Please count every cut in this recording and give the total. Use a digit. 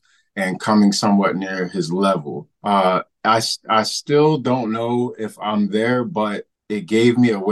2